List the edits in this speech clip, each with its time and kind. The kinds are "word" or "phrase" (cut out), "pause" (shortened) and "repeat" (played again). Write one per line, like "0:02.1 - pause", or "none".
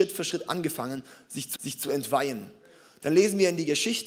0:01.6 - repeat